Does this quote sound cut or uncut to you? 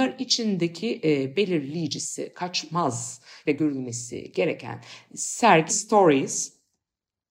cut